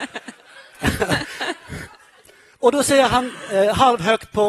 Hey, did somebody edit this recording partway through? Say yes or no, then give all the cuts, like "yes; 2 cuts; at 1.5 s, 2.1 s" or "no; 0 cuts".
no; 0 cuts